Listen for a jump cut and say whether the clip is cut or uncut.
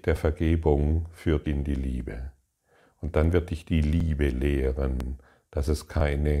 cut